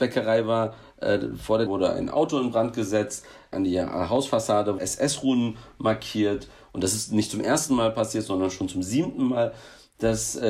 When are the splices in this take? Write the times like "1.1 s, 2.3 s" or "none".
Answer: 1.7 s, 4.8 s